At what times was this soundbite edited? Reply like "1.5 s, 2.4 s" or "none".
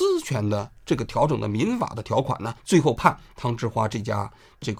2.6 s

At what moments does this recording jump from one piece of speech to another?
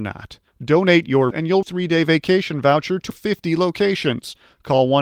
1.3 s, 1.6 s, 3.1 s

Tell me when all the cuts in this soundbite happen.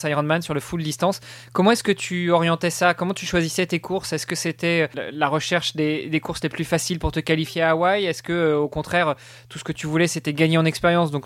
none

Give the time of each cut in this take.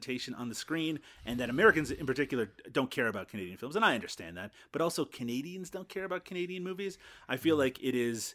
none

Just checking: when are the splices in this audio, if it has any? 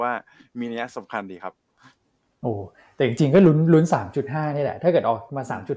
none

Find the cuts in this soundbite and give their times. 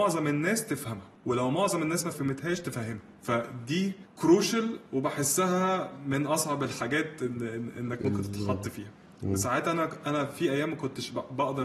2.1 s

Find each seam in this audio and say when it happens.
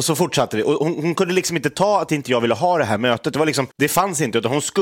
3.7 s

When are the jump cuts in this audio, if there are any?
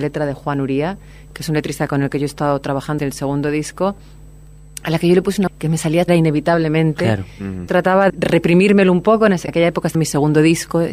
3.0 s, 5.5 s, 6.1 s, 7.7 s, 8.1 s, 9.5 s, 9.9 s

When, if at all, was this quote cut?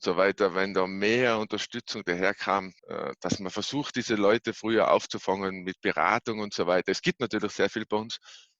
2.8 s

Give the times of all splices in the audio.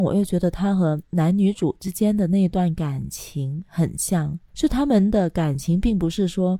4.5 s

